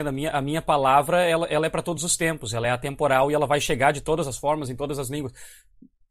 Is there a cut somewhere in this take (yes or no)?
no